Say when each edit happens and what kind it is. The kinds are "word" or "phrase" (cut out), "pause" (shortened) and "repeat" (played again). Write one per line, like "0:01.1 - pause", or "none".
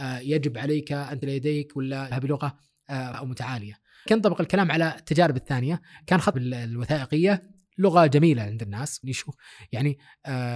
0:01.2 - word
0:02.1 - word
0:03.1 - word
0:04.1 - word
0:06.3 - word
0:09.0 - word